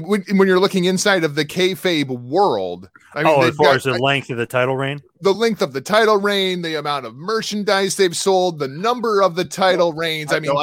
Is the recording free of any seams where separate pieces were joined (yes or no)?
yes